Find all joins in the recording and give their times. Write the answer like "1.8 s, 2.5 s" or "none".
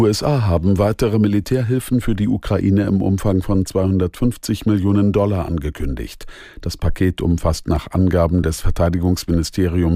none